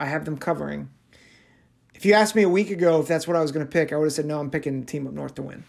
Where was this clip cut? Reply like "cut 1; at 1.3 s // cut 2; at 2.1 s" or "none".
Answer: none